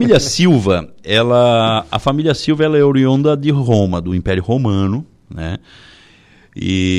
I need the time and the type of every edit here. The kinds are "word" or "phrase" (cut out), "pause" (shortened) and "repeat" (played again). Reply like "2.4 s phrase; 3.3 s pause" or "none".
none